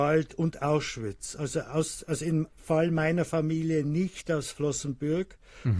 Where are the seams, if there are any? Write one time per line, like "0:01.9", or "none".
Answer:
0:02.5